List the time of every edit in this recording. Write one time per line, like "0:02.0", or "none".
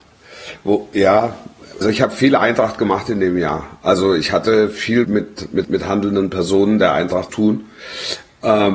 0:01.8
0:05.0
0:05.6
0:07.3